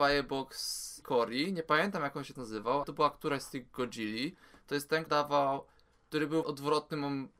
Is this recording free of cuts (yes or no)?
no